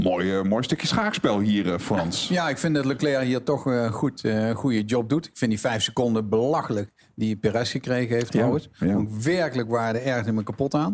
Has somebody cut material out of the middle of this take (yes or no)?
no